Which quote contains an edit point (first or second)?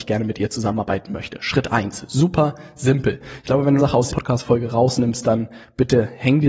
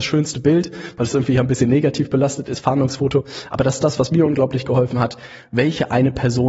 first